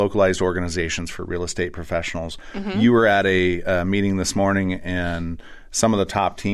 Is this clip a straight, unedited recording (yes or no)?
yes